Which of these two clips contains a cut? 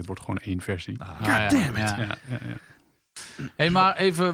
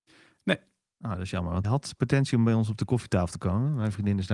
second; 1 cut; at 1.6 s

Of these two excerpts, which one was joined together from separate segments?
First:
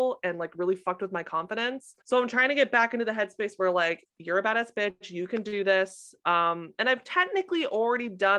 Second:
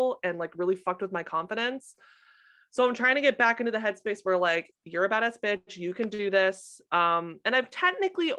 first; 1 cut; at 2.0 s

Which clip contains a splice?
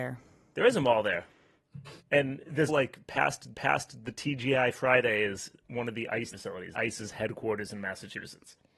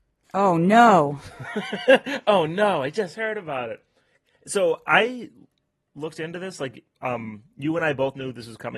first; 6 cuts; at 2.0 s, 2.7 s, 3.5 s, 5.5 s, 6.3 s, 6.7 s

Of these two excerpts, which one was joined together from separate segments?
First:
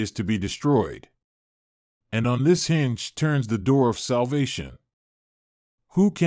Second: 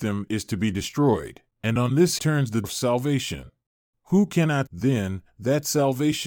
second; 5 cuts; at 1.5 s, 2.2 s, 2.6 s, 3.9 s, 4.7 s

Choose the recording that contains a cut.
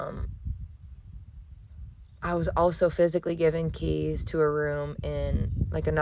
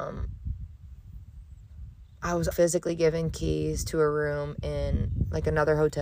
second; 1 cut; at 2.5 s

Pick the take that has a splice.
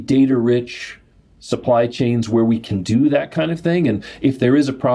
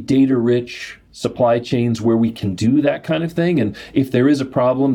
second; 1 cut; at 1.1 s

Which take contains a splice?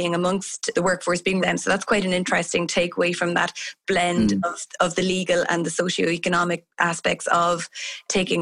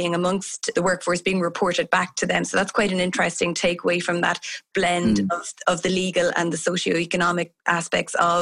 first; 1 cut; at 1.4 s

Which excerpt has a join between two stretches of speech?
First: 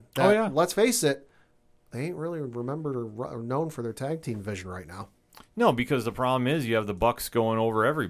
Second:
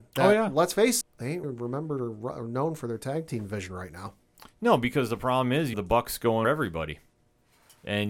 second; 4 cuts; at 1.0 s, 1.4 s, 5.7 s, 6.4 s

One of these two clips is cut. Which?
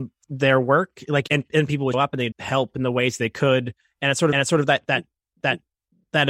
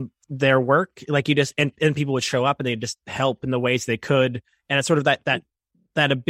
first; 5 cuts; at 1.3 s, 1.9 s, 2.3 s, 4.3 s, 5.4 s

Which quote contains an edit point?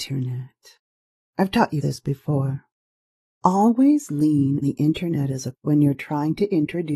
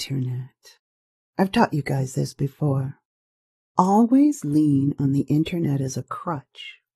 first; 3 cuts; at 1.8 s, 4.6 s, 5.5 s

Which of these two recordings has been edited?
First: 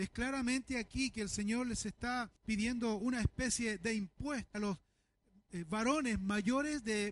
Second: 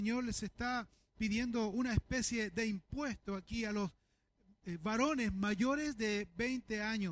first; 2 cuts; at 2.4 s, 4.5 s

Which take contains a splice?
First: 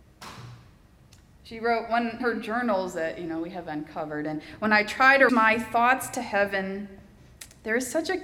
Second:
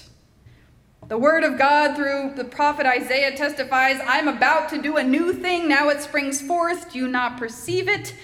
first; 2 cuts; at 2.2 s, 5.3 s

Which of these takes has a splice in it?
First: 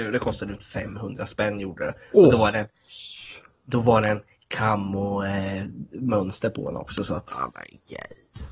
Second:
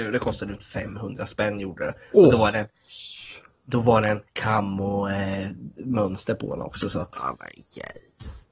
second; 1 cut; at 4.3 s

